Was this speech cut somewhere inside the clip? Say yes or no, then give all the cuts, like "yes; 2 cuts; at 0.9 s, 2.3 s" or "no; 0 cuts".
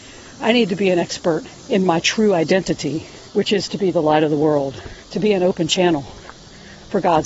yes; 3 cuts; at 1.6 s, 3.3 s, 5.0 s